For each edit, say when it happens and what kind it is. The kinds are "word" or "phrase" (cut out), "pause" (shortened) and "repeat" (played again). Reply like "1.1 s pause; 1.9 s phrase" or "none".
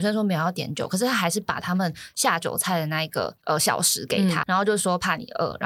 4.4 s word